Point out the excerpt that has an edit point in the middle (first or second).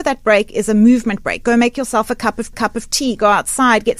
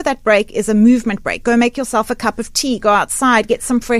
first